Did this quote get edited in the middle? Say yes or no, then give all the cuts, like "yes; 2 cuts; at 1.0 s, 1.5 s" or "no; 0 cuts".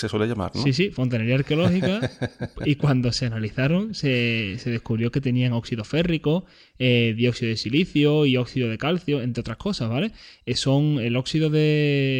no; 0 cuts